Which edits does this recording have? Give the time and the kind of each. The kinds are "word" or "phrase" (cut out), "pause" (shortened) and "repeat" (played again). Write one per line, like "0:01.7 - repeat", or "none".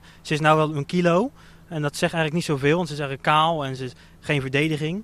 none